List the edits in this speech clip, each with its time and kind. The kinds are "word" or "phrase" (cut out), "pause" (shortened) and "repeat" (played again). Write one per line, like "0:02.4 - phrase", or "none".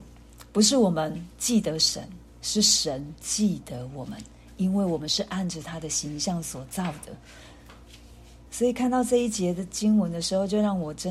0:08.4 - pause